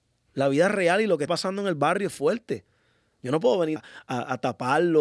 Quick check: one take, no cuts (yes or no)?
no